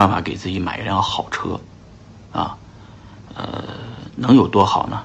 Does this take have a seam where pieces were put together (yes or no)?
no